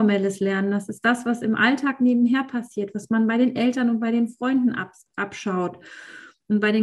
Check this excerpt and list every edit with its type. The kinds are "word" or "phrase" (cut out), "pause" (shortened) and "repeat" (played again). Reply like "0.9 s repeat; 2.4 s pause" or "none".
none